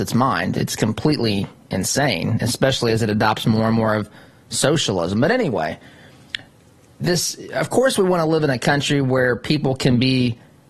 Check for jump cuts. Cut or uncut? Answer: uncut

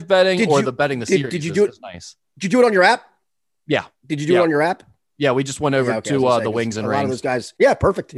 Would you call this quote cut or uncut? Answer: uncut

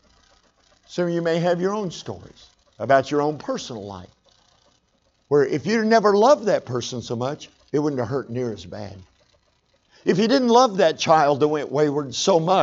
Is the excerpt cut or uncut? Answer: uncut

